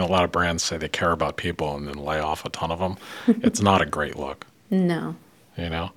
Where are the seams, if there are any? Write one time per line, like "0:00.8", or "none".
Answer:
none